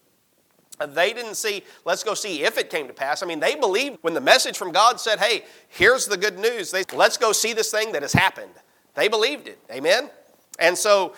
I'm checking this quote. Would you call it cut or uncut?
cut